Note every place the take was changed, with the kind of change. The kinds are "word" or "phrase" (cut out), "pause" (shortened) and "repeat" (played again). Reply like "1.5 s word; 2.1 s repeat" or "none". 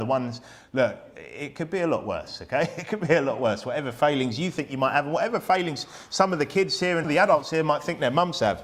7.0 s word